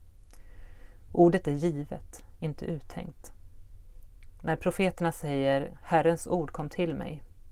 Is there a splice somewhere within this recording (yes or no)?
no